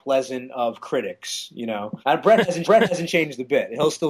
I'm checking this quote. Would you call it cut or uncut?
cut